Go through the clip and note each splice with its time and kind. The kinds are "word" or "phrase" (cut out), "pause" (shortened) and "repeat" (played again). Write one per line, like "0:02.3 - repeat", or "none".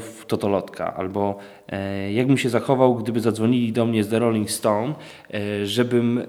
none